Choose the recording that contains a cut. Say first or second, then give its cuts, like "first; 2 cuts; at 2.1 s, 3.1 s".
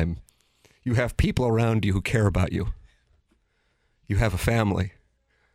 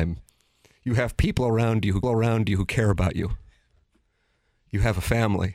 second; 1 cut; at 2.0 s